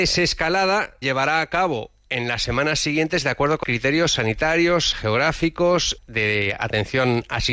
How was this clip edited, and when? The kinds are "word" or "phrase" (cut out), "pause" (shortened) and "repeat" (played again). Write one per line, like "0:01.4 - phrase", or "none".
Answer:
0:01.0 - word
0:03.6 - word
0:04.9 - word
0:06.0 - word